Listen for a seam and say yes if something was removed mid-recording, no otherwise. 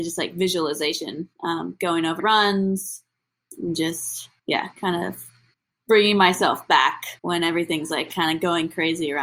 yes